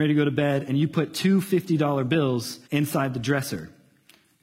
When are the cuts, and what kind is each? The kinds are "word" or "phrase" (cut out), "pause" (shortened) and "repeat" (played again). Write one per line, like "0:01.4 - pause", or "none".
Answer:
0:02.6 - pause